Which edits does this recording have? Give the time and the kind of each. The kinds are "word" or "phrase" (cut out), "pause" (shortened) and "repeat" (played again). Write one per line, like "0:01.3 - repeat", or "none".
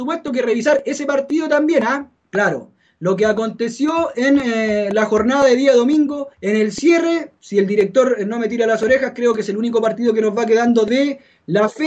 0:02.2 - pause
0:06.3 - pause